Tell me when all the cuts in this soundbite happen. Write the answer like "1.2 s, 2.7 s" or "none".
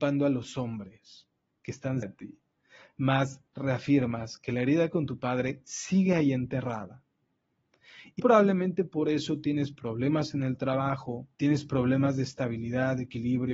2.0 s, 8.2 s, 11.3 s